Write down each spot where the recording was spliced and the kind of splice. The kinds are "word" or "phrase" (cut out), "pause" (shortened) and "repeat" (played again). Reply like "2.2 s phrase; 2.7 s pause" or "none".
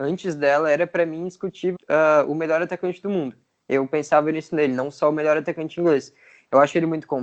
1.8 s word